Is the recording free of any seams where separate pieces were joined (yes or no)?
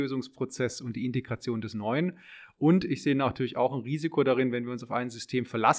yes